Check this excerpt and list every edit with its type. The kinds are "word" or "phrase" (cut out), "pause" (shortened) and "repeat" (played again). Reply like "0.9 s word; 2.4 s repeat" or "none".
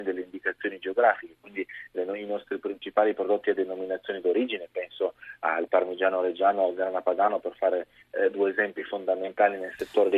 none